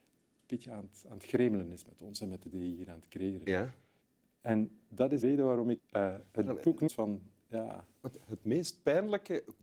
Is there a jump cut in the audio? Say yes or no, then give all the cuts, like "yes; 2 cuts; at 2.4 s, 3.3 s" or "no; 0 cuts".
yes; 5 cuts; at 2.5 s, 4.0 s, 5.2 s, 5.8 s, 6.9 s